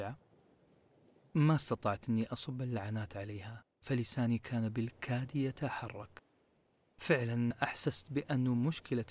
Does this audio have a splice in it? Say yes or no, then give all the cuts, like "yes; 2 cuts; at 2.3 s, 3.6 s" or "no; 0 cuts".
no; 0 cuts